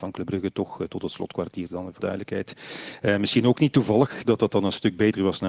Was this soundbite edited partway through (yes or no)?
yes